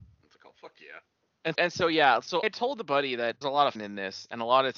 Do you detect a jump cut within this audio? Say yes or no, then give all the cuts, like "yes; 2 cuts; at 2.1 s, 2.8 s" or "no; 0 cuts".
yes; 4 cuts; at 1.5 s, 2.4 s, 3.4 s, 3.8 s